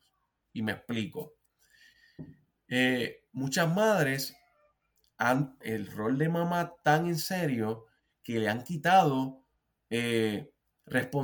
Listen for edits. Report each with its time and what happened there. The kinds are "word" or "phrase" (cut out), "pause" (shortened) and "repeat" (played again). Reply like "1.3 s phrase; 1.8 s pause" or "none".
5.6 s word